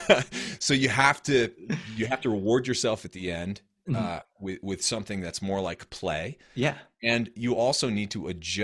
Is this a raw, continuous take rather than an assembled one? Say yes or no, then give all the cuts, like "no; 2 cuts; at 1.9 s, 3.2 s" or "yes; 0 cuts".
yes; 0 cuts